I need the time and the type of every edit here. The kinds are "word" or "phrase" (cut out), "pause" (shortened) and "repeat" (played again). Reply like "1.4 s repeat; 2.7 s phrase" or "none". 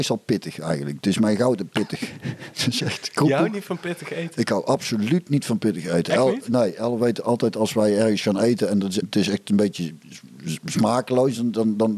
9.0 s word